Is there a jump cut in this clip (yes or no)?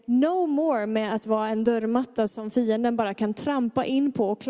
no